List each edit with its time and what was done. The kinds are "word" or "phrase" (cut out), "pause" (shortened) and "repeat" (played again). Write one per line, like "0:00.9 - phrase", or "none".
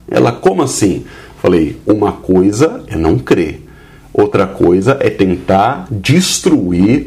none